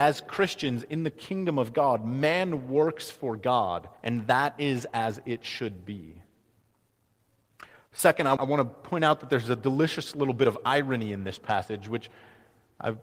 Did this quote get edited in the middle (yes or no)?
yes